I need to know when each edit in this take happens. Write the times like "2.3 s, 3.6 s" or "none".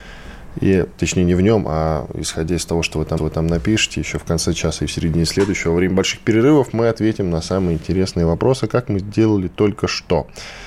3.2 s